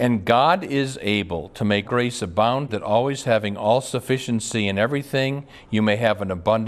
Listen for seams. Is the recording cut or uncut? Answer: cut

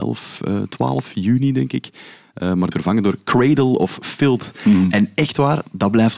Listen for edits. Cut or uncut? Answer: cut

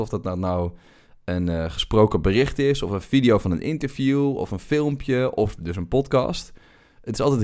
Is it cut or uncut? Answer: uncut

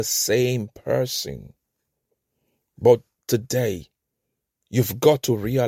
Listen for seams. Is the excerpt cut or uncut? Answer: uncut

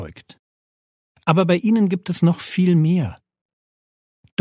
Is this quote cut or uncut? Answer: uncut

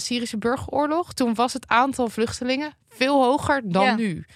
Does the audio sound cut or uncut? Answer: uncut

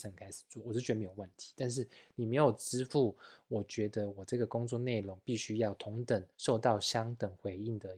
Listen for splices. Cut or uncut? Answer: cut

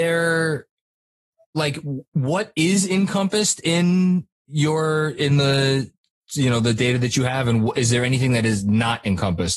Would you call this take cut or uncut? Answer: uncut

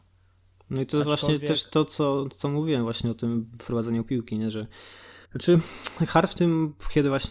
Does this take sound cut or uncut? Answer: cut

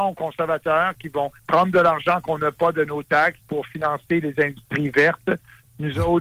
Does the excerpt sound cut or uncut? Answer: cut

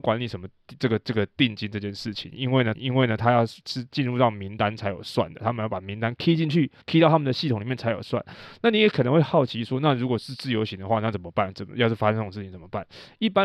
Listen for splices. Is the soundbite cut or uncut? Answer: cut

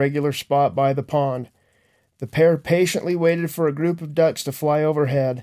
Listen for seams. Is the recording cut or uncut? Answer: uncut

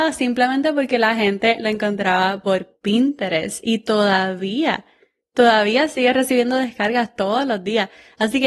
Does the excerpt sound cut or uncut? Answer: uncut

